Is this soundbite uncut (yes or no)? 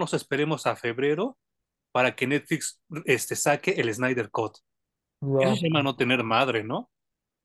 yes